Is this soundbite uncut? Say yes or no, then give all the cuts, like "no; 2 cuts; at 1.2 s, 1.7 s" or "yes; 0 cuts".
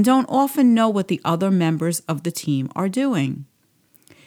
yes; 0 cuts